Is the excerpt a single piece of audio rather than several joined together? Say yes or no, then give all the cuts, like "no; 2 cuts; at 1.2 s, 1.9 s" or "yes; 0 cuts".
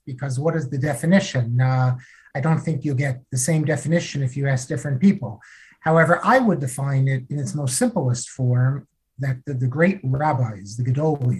no; 1 cut; at 3.2 s